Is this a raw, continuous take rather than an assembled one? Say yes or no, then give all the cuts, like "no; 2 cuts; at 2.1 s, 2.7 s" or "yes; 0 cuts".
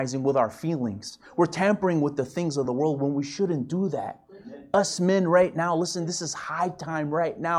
yes; 0 cuts